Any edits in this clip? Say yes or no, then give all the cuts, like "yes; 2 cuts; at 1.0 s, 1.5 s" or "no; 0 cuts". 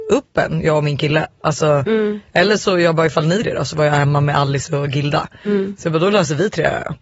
yes; 1 cut; at 3.4 s